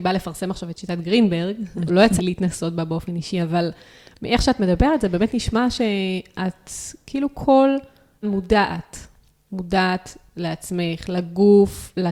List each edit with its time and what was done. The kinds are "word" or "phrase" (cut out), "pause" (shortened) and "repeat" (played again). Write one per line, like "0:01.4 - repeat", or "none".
0:01.9 - word
0:02.2 - word
0:08.2 - word